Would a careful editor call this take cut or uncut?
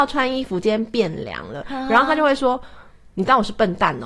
uncut